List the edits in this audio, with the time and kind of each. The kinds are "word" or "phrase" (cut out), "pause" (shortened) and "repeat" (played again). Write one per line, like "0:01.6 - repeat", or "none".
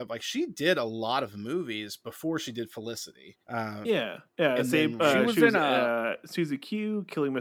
0:03.4 - pause
0:04.3 - pause